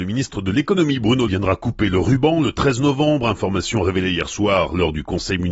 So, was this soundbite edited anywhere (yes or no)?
yes